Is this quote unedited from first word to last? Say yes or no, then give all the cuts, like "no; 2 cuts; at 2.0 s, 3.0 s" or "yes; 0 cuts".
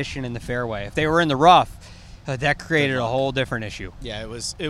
yes; 0 cuts